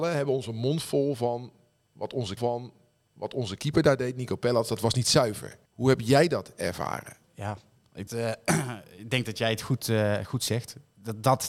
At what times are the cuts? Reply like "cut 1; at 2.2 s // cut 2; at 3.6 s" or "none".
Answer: cut 1; at 2.4 s // cut 2; at 5.7 s // cut 3; at 7.2 s // cut 4; at 8.1 s